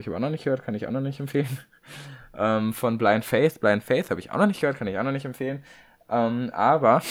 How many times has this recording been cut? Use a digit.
0